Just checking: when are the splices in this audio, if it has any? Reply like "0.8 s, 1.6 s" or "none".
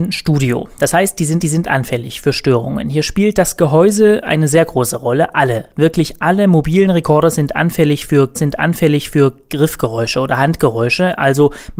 1.4 s, 8.3 s